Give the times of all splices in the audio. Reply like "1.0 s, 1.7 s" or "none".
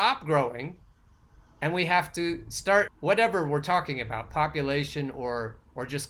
2.9 s

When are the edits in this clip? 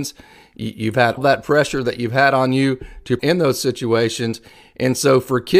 1.2 s, 3.2 s

